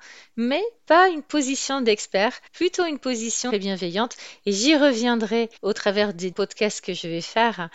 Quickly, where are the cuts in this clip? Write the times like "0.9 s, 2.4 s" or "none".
2.5 s, 3.5 s, 5.6 s, 6.3 s